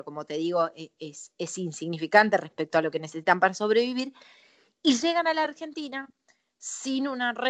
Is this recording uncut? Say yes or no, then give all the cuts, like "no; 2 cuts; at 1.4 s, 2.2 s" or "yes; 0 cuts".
yes; 0 cuts